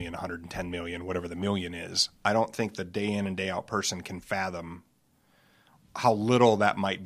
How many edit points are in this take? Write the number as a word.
zero